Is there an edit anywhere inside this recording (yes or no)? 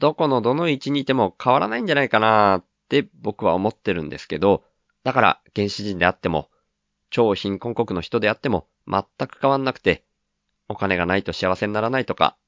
yes